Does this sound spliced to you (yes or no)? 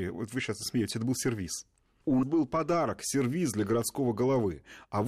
yes